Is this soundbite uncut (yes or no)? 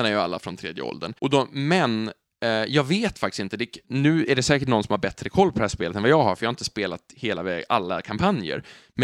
no